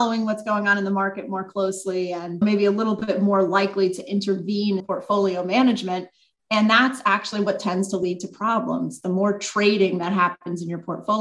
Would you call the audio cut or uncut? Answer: cut